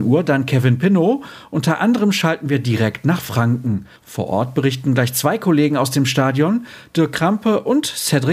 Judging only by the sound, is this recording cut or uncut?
cut